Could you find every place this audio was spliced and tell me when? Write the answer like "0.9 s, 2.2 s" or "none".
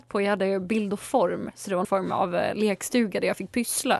1.8 s

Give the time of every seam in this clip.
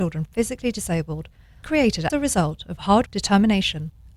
1.6 s, 2.1 s, 3.1 s

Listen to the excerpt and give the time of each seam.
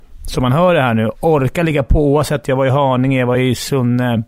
none

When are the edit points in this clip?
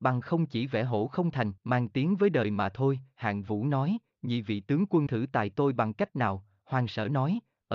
1.6 s, 5.1 s

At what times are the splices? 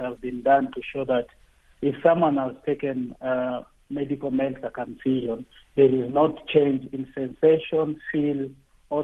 none

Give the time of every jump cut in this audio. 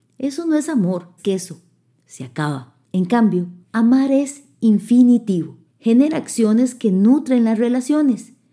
1.2 s, 2.8 s, 3.6 s, 5.7 s

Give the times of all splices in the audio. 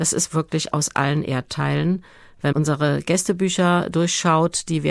2.5 s

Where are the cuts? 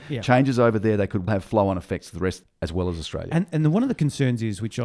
1.3 s, 2.4 s

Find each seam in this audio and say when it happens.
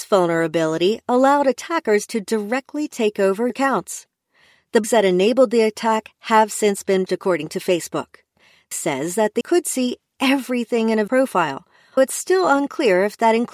3.5 s, 4.8 s, 7.1 s, 8.7 s, 9.4 s, 11.1 s, 12.0 s

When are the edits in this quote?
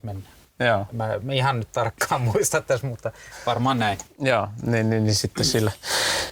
none

